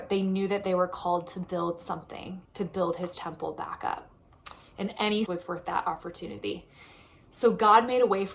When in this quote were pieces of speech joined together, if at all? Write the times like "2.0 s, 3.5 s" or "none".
2.4 s, 5.3 s